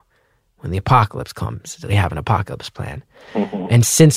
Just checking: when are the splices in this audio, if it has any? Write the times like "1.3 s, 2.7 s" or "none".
1.9 s